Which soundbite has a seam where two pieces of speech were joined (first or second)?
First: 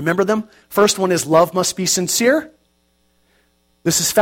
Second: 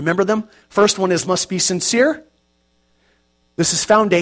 second